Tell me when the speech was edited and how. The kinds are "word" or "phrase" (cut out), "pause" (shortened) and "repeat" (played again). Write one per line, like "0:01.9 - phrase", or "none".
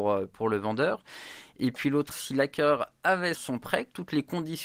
0:02.1 - phrase
0:03.3 - word